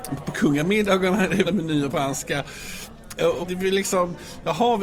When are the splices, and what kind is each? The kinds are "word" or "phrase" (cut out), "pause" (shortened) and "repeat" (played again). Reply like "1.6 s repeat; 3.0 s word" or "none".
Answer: 1.4 s word; 1.9 s word; 3.4 s word